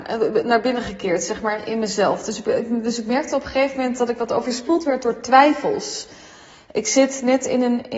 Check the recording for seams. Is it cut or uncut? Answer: uncut